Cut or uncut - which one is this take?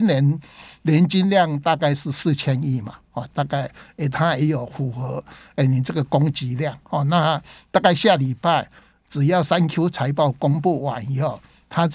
uncut